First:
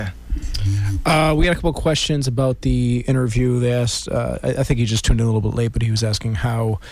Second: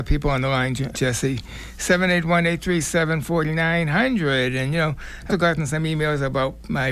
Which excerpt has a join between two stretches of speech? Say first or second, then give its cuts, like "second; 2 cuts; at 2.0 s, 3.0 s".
second; 2 cuts; at 0.9 s, 5.3 s